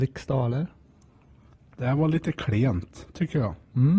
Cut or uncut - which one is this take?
uncut